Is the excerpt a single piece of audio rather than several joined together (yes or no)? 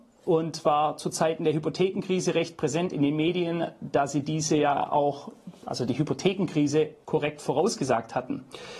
yes